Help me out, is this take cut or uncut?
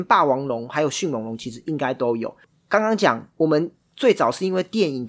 uncut